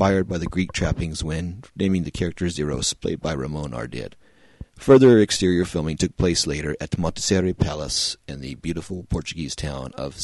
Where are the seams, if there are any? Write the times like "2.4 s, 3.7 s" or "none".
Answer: 4.7 s